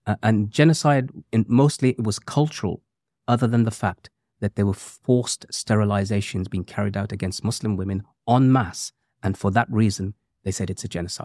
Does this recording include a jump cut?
no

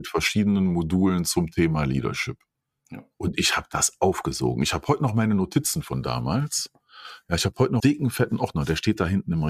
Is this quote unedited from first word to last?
no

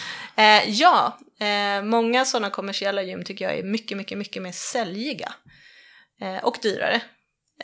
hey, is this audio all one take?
yes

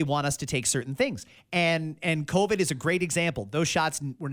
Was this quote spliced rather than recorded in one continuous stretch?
no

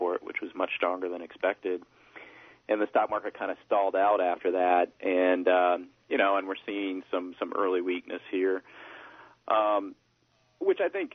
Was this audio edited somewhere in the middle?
no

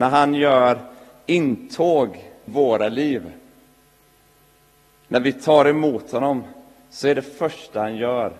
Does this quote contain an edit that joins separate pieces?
yes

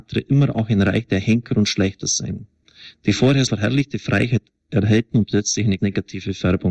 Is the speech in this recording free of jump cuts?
no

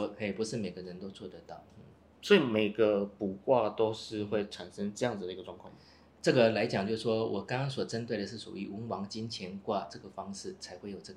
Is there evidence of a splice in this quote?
no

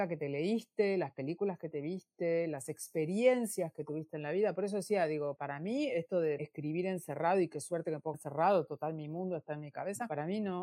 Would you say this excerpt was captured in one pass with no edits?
no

